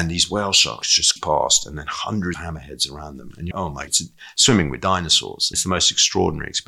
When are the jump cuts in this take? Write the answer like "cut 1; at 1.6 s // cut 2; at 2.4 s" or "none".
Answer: cut 1; at 1.2 s // cut 2; at 2.3 s // cut 3; at 3.5 s // cut 4; at 3.9 s // cut 5; at 5.5 s